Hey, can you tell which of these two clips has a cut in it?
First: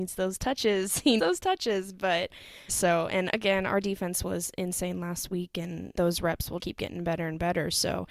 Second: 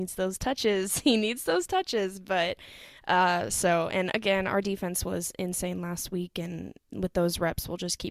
first; 4 cuts; at 1.2 s, 2.7 s, 5.9 s, 6.6 s

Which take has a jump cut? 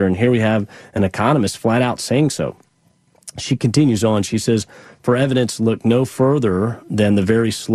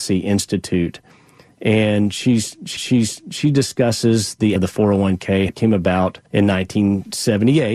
second; 4 cuts; at 2.8 s, 4.6 s, 5.5 s, 6.3 s

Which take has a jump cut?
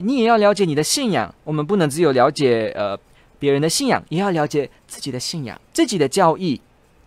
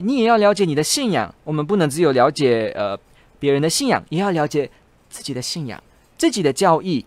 first; 2 cuts; at 4.8 s, 5.6 s

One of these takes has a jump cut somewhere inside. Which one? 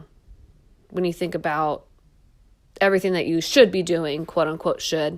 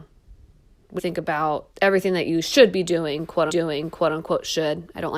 second; 3 cuts; at 1.0 s, 1.7 s, 3.5 s

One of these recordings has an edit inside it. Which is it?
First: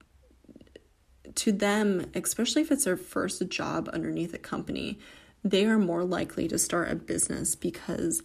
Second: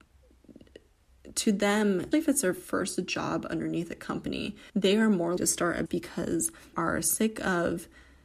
second; 5 cuts; at 2.1 s, 4.7 s, 5.4 s, 5.9 s, 6.7 s

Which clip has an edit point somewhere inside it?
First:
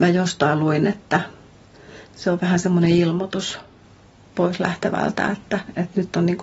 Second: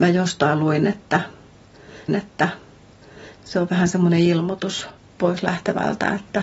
second; 2 cuts; at 2.1 s, 5.0 s

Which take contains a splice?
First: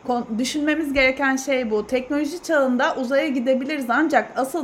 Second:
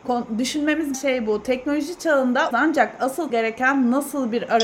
second; 3 cuts; at 0.9 s, 2.5 s, 3.3 s

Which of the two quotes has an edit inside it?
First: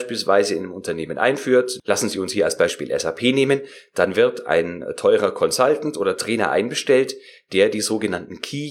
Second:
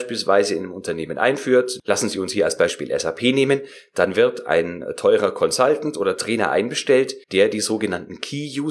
second; 1 cut; at 7.2 s

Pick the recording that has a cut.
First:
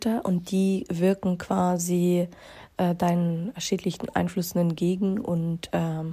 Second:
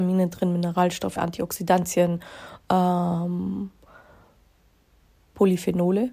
second; 1 cut; at 1.2 s

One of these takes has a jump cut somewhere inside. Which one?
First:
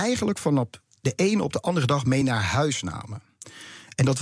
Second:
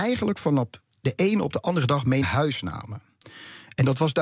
second; 1 cut; at 2.2 s

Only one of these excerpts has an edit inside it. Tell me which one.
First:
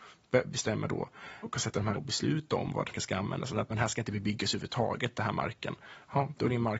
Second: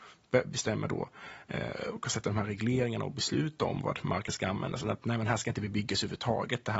first; 4 cuts; at 1.4 s, 2.0 s, 2.9 s, 3.7 s

